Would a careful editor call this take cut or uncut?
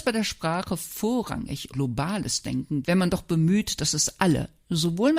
cut